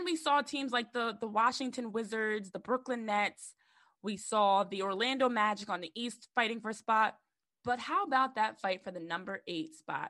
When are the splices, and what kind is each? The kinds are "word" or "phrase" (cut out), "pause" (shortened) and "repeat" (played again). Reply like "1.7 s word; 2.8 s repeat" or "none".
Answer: none